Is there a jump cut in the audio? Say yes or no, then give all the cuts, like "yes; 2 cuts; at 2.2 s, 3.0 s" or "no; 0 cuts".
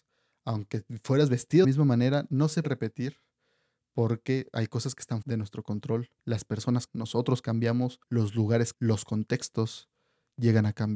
yes; 7 cuts; at 1.6 s, 2.6 s, 5.2 s, 6.2 s, 6.9 s, 8.0 s, 8.7 s